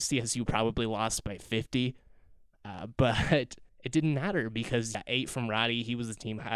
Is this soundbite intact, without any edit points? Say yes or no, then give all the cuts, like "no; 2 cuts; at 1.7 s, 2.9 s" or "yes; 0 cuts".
no; 2 cuts; at 3.7 s, 4.9 s